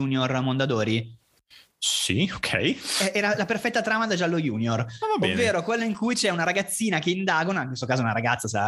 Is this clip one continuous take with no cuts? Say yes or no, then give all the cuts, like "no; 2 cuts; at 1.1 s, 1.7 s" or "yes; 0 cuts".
yes; 0 cuts